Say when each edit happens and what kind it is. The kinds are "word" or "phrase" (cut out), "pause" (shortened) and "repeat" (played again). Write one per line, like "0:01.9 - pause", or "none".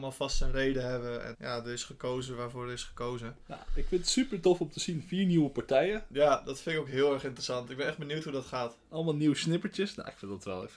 0:01.3 - word